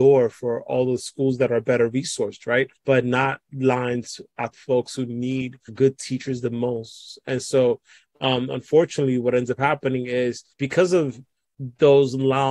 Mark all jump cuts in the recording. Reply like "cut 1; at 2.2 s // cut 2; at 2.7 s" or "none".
cut 1; at 2.8 s // cut 2; at 4.5 s // cut 3; at 5.7 s // cut 4; at 10.5 s